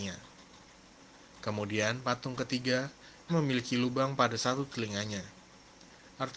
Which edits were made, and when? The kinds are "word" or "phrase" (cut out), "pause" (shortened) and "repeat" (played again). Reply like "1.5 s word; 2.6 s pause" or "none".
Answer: 3.3 s word